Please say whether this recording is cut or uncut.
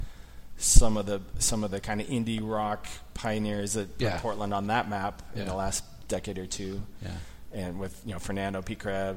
uncut